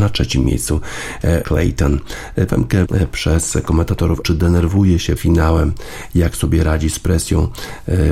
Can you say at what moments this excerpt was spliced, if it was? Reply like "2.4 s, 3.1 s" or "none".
1.4 s, 2.5 s, 2.8 s, 4.2 s, 5.2 s

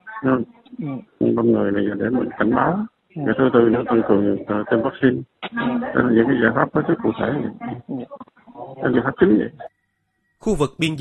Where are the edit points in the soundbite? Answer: 8.9 s

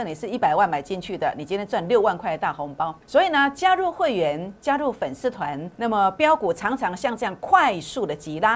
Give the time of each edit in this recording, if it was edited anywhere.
3.0 s, 5.7 s

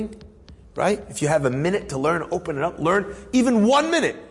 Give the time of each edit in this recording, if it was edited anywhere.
none

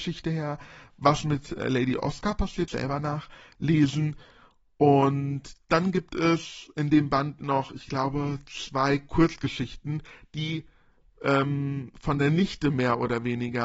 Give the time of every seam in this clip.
2.7 s

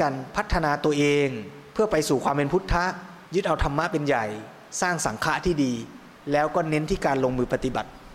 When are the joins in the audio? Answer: 1.7 s, 3.3 s, 6.1 s

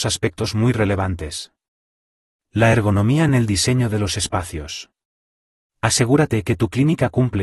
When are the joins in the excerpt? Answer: none

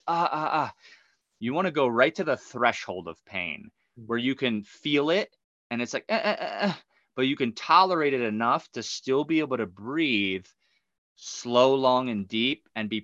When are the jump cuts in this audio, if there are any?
none

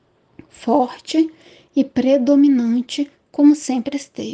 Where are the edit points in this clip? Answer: none

